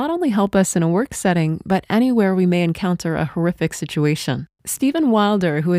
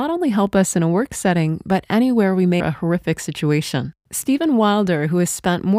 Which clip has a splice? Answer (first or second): second